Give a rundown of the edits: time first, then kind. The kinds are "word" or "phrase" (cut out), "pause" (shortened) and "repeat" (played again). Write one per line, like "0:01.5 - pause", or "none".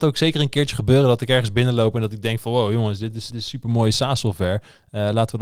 0:03.3 - word